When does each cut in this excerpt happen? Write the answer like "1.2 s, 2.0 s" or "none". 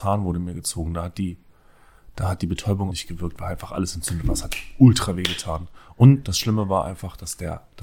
2.9 s